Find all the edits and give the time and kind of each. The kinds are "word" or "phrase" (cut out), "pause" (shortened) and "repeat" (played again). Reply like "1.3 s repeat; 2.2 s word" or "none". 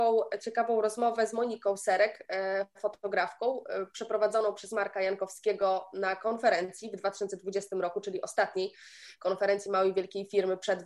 none